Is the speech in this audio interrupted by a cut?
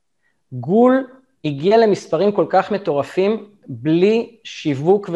no; 0 cuts

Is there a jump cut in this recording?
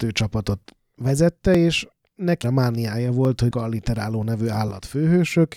yes; 2 cuts; at 2.4 s, 3.5 s

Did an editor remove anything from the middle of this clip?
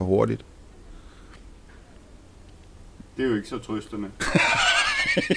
no; 0 cuts

